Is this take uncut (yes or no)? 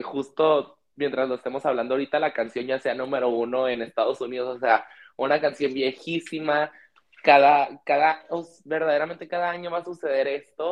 yes